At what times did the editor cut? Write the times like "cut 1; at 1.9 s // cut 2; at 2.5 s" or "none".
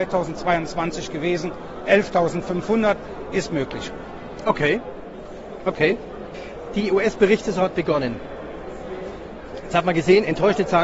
none